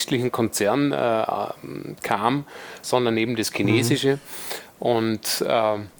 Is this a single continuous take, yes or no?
yes